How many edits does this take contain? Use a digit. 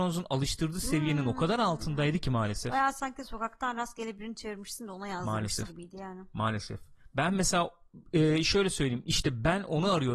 1